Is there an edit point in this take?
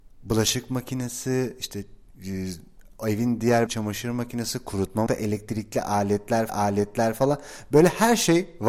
yes; 4 cuts; at 2.1 s, 3.7 s, 5.1 s, 6.5 s

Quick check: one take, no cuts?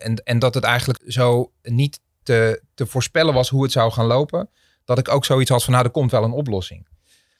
no; 2 cuts; at 1.0 s, 2.2 s

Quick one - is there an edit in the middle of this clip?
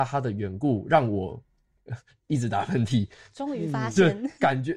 no; 0 cuts

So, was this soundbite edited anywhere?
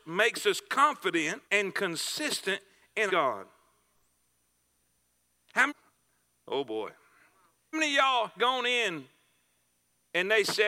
yes; 5 cuts; at 1.4 s, 3.1 s, 5.7 s, 7.7 s, 8.4 s

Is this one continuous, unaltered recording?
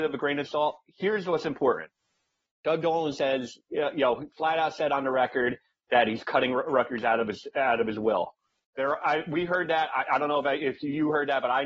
yes; 0 cuts

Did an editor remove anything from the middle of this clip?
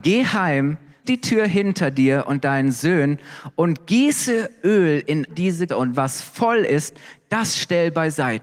yes; 3 cuts; at 1.0 s, 5.3 s, 5.7 s

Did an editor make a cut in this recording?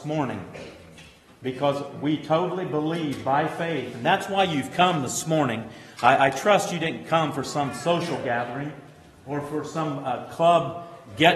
no; 0 cuts

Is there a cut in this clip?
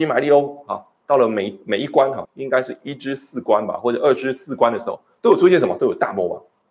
yes; 1 cut; at 2.2 s

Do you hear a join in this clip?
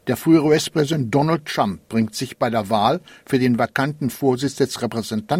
no; 0 cuts

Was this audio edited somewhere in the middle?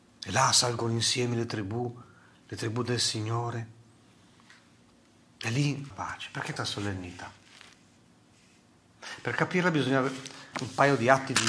yes; 3 cuts; at 5.9 s, 6.6 s, 10.5 s

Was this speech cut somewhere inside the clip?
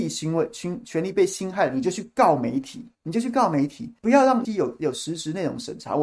yes; 3 cuts; at 2.9 s, 4.0 s, 4.4 s

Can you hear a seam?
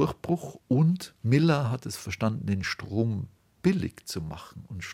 no; 0 cuts

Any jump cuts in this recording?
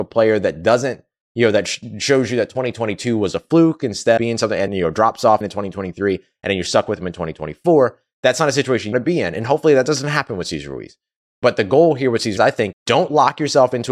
yes; 6 cuts; at 4.2 s, 4.7 s, 5.4 s, 8.9 s, 12.4 s, 12.7 s

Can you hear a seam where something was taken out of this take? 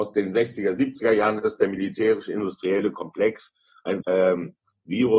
yes; 1 cut; at 4.0 s

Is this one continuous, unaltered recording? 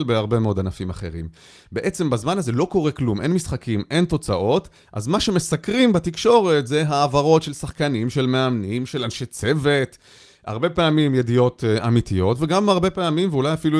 yes; 0 cuts

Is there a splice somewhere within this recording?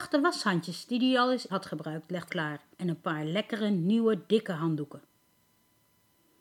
yes; 3 cuts; at 1.5 s, 2.3 s, 2.7 s

